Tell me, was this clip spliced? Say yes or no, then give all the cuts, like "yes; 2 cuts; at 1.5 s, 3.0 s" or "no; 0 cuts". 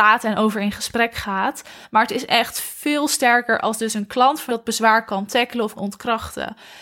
yes; 2 cuts; at 4.5 s, 5.8 s